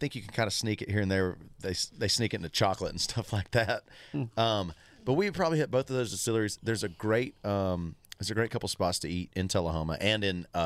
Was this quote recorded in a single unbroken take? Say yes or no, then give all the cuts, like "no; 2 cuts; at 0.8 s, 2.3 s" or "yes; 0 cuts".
yes; 0 cuts